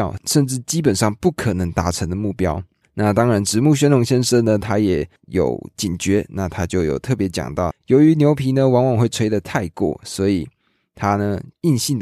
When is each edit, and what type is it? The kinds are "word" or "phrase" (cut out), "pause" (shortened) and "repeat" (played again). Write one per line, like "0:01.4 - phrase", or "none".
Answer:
0:07.7 - phrase